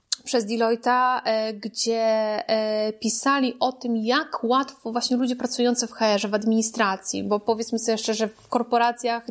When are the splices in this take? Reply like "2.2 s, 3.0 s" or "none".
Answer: none